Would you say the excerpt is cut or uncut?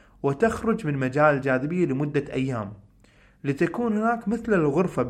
uncut